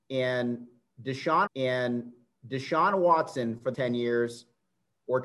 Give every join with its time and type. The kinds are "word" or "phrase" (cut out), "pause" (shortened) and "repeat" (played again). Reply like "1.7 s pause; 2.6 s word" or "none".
1.5 s repeat; 3.7 s word